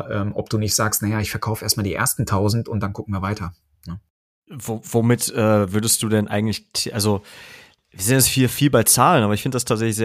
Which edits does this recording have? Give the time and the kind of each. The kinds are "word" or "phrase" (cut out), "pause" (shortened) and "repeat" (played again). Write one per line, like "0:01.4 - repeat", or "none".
none

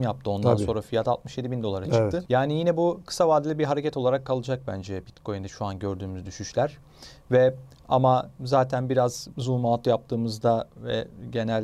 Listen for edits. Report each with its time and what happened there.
none

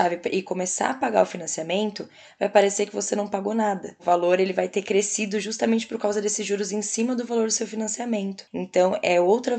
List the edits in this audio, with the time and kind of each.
none

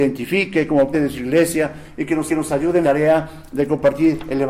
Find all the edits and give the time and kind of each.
0:00.9 - word
0:02.3 - repeat
0:02.8 - word

